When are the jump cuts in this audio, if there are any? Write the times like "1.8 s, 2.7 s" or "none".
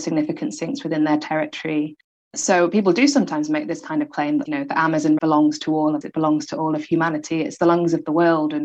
4.4 s, 5.2 s, 6.0 s